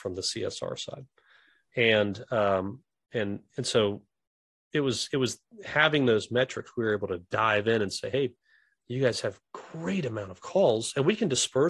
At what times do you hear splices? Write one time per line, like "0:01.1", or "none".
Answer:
none